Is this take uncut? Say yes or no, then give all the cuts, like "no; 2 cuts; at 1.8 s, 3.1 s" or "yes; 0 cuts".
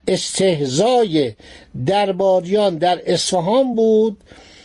yes; 0 cuts